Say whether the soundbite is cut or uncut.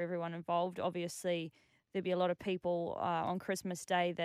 uncut